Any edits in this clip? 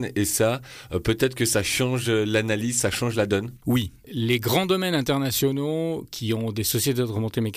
no; 0 cuts

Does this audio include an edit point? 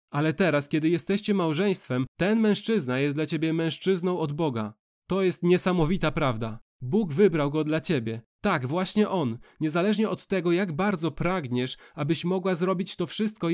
no; 0 cuts

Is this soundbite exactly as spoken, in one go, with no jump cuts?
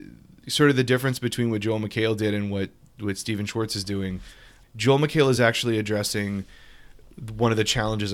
yes; 0 cuts

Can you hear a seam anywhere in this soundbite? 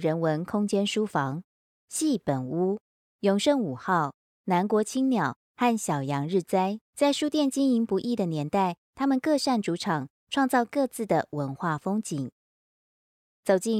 yes; 1 cut; at 6.8 s

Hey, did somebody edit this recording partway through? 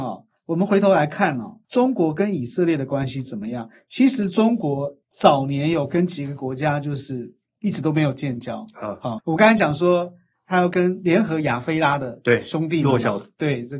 yes; 3 cuts; at 1.6 s, 5.0 s, 9.2 s

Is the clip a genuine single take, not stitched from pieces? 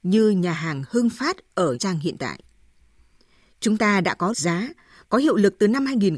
no; 2 cuts; at 1.7 s, 4.3 s

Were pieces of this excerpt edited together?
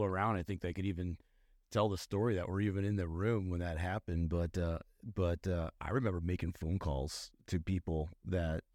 no; 0 cuts

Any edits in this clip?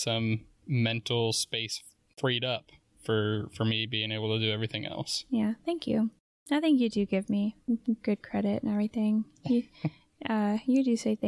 no; 0 cuts

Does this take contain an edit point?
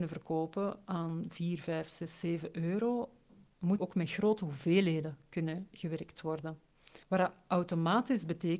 yes; 2 cuts; at 3.8 s, 7.0 s

